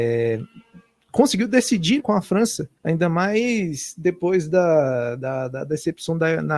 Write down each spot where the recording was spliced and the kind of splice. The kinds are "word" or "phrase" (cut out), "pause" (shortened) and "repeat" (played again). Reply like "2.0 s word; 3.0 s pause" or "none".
2.0 s word; 2.8 s pause